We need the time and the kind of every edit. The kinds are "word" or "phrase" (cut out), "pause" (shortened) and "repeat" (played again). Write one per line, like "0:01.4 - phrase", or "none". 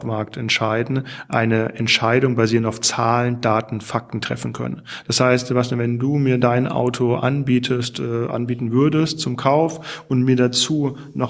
none